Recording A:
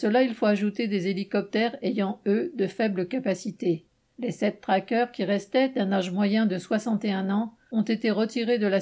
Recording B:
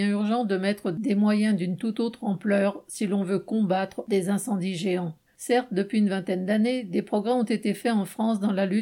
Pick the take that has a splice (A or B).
B